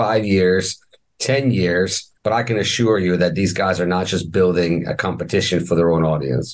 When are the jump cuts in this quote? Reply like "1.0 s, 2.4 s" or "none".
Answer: 2.2 s